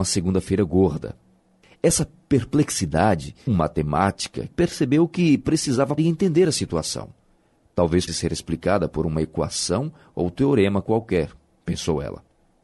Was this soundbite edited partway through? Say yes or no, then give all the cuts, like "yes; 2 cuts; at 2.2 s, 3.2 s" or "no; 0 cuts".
yes; 4 cuts; at 3.5 s, 4.5 s, 6.0 s, 8.1 s